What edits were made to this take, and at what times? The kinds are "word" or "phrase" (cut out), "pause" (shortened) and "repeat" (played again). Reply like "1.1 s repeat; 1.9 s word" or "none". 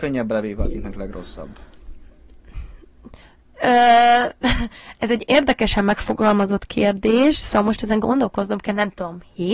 none